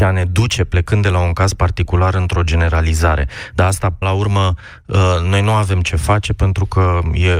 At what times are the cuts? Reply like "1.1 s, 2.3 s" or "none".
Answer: 4.0 s

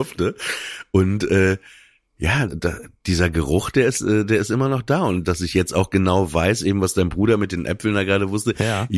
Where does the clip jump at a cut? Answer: 2.5 s

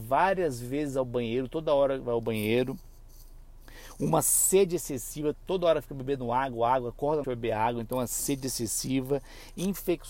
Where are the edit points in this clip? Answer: 7.2 s

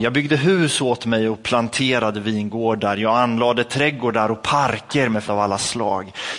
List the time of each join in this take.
5.2 s

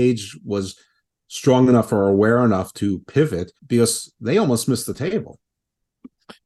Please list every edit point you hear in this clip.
3.6 s

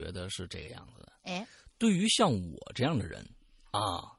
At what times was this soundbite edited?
none

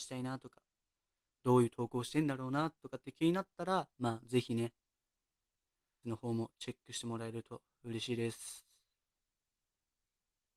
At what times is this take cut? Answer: 3.9 s, 6.0 s

